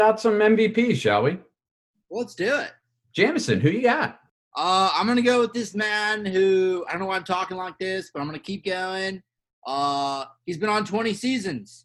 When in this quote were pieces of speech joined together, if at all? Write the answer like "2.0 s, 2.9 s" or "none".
none